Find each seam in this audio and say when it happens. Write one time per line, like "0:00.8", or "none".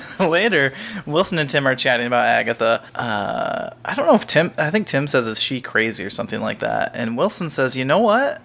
0:02.9